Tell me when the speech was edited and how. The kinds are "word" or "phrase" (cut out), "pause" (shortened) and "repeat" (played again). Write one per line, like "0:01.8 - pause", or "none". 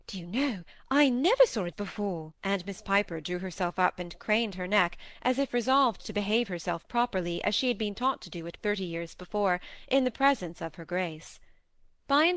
0:01.7 - word
0:02.4 - pause
0:08.6 - word